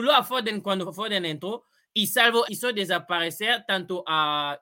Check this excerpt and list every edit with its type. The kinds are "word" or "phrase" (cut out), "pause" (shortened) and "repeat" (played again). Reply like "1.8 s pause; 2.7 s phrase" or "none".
2.4 s phrase